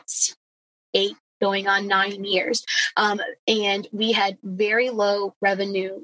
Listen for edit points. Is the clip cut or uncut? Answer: uncut